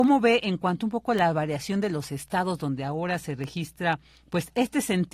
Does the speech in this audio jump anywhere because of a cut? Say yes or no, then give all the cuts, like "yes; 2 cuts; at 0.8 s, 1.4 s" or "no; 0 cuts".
no; 0 cuts